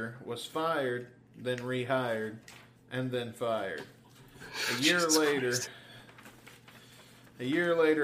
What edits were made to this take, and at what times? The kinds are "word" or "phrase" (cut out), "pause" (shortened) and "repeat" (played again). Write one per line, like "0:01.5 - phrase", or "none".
none